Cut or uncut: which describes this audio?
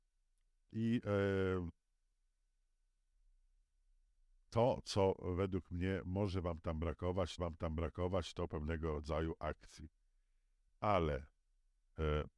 cut